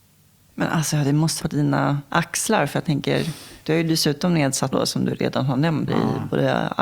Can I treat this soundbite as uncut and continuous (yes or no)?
no